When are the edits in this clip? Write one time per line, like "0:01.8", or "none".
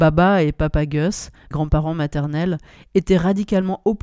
0:01.5

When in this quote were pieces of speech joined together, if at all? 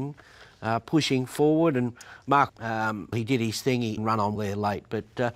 0:02.5
0:03.1
0:04.0
0:04.4

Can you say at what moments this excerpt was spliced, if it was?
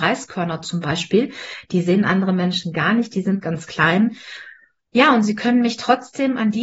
none

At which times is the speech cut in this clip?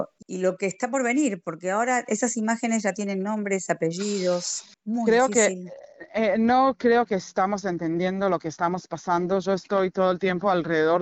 0:04.8

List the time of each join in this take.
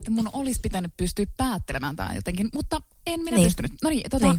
none

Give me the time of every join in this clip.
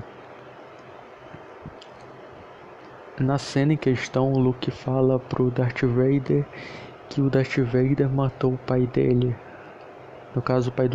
none

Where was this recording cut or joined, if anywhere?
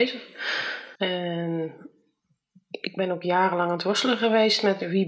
0:01.0

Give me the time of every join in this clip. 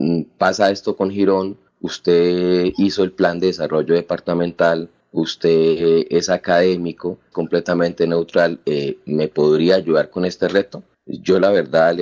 0:07.3

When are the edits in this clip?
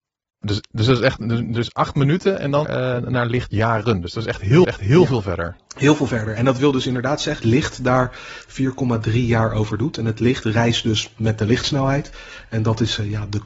0:02.6
0:04.6
0:05.6
0:07.4

